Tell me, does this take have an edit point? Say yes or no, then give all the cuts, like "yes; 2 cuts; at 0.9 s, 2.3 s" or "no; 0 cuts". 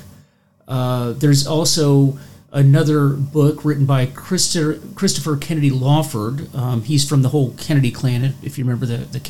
no; 0 cuts